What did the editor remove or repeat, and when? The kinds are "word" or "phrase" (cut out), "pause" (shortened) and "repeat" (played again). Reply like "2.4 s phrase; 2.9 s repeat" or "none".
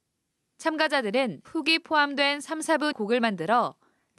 1.4 s word; 2.9 s word

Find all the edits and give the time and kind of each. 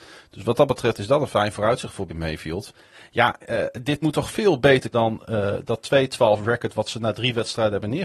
2.1 s word; 4.0 s word; 4.9 s word

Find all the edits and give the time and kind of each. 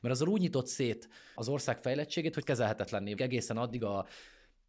1.4 s word; 2.4 s word; 3.2 s word; 3.8 s word

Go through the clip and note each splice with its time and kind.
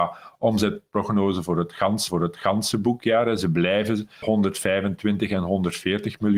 2.1 s repeat; 4.2 s word

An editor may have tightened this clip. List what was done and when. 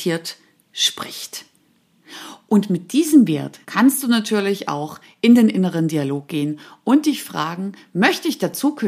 3.6 s pause

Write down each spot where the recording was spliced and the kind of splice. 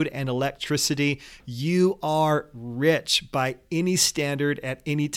none

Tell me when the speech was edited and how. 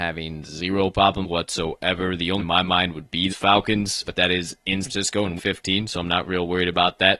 1.2 s word; 2.4 s word; 3.3 s word; 4.0 s word; 4.8 s word; 5.4 s word

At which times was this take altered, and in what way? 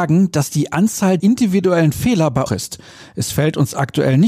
1.2 s word; 2.5 s phrase

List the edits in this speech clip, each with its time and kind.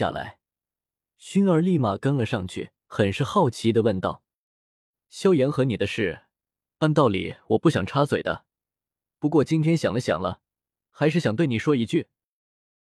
2.8 s pause

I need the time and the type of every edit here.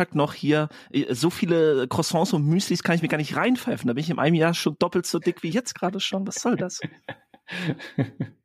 none

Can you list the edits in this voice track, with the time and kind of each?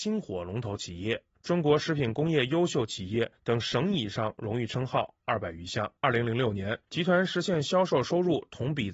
1.3 s pause; 3.3 s pause; 6.0 s pause; 6.8 s pause

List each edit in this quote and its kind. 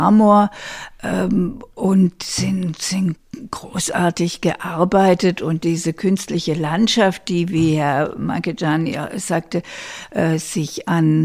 none

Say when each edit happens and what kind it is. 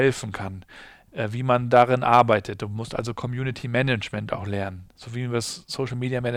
none

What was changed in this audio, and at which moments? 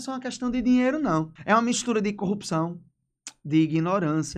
1.4 s pause

